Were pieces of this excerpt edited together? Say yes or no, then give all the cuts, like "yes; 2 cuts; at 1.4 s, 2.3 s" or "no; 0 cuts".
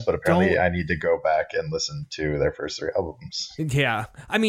no; 0 cuts